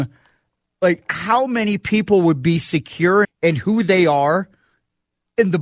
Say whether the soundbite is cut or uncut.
cut